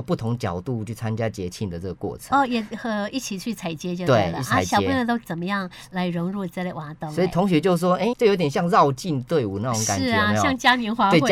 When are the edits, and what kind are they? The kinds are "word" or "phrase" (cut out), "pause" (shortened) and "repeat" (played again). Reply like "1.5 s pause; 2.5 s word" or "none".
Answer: 8.1 s word

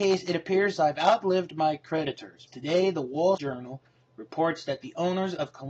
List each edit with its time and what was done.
2.5 s word; 3.4 s word

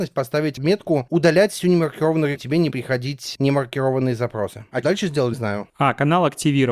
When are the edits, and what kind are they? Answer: 2.4 s word; 2.7 s word; 4.8 s word; 5.3 s word

